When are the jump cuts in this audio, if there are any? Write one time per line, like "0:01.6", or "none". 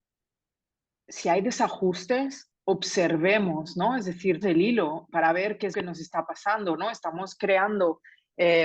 0:04.4
0:05.7